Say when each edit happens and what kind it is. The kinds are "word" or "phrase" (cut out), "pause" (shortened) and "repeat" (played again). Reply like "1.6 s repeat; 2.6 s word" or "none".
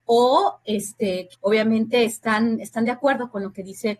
1.3 s word

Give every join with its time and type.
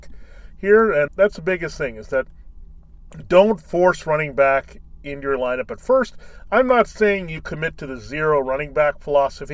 1.1 s word

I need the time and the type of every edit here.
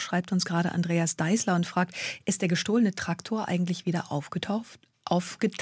none

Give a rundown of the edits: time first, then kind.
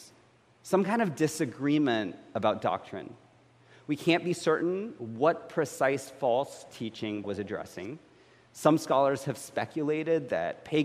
7.2 s word

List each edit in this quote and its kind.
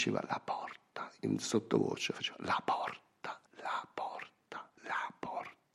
3.5 s pause; 4.8 s pause

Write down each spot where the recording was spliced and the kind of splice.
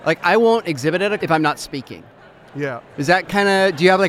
1.2 s word

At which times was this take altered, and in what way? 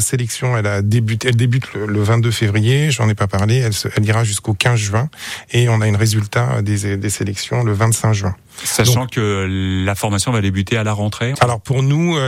11.3 s word

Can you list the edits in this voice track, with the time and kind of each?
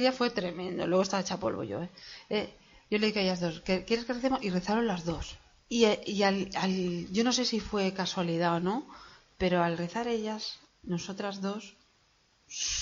10.6 s pause

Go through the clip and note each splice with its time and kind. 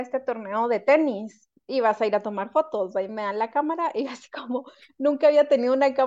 none

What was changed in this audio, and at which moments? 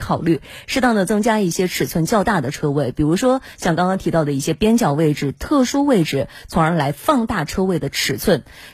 none

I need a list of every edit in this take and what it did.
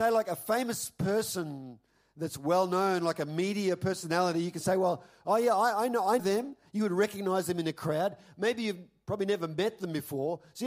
6.2 s word

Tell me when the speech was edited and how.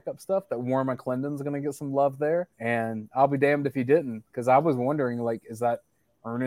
2.5 s pause

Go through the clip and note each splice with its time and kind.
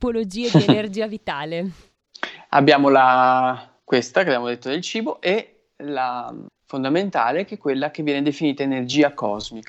3.8 s pause; 6.5 s phrase

